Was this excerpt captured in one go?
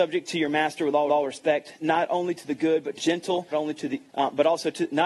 no; 4 cuts; at 1.1 s, 3.0 s, 3.5 s, 4.1 s

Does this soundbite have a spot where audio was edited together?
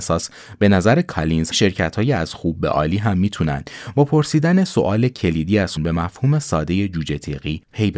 yes; 3 cuts; at 1.5 s, 4.7 s, 5.8 s

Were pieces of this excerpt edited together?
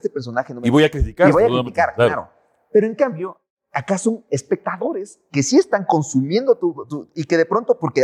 no; 0 cuts

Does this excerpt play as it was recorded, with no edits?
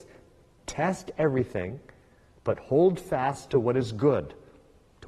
yes; 0 cuts

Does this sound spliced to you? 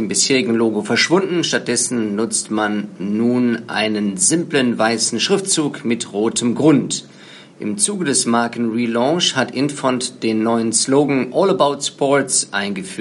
no; 0 cuts

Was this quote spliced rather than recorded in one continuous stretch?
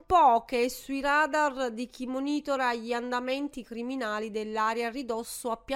no; 0 cuts

